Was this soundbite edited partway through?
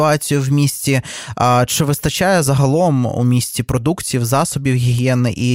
no; 0 cuts

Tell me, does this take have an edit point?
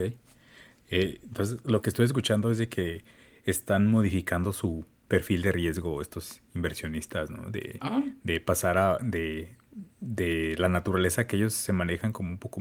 no; 0 cuts

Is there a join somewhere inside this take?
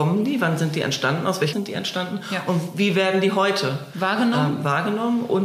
yes; 1 cut; at 1.5 s

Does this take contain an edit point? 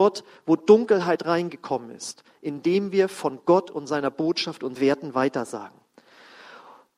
yes; 1 cut; at 4.8 s

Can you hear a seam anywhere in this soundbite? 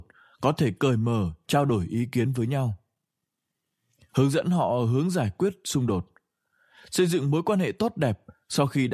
no; 0 cuts

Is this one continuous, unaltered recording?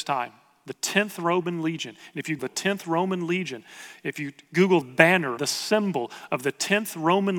no; 3 cuts; at 2.4 s, 4.8 s, 5.4 s

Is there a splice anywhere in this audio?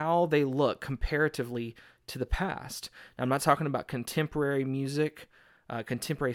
no; 0 cuts

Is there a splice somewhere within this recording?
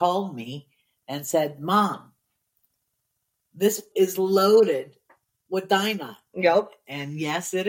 yes; 1 cut; at 3.9 s

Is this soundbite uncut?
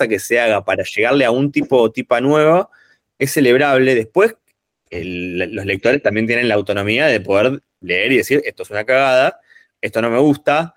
yes; 0 cuts

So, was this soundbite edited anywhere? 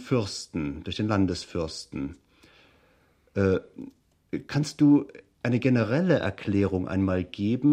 no; 0 cuts

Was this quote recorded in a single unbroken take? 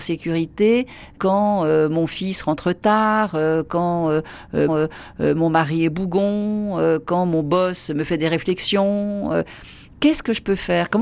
no; 1 cut; at 4.7 s

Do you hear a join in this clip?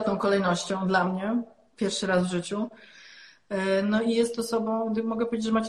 no; 0 cuts

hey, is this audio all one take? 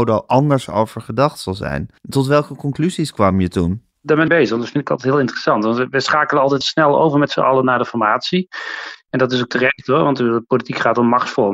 no; 3 cuts; at 2.0 s, 4.3 s, 6.6 s

